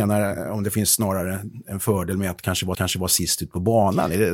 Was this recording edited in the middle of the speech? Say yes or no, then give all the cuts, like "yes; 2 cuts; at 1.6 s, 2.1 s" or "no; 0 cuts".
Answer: yes; 1 cut; at 2.7 s